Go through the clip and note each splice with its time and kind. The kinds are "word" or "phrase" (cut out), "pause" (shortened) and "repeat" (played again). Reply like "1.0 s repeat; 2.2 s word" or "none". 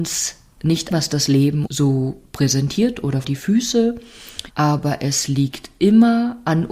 0.9 s word; 1.7 s word; 3.2 s word; 4.5 s word